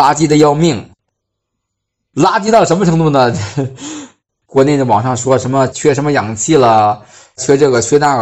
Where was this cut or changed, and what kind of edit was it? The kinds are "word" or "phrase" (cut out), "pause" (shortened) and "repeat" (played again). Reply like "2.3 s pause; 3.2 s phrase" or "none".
none

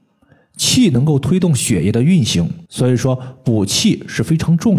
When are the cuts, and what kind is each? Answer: 2.7 s pause

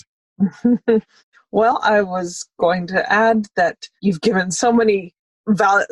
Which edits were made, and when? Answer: 1.0 s pause; 4.0 s pause

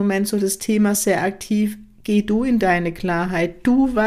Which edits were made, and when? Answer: none

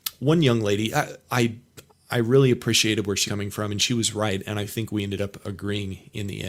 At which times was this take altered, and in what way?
1.9 s pause; 3.3 s word

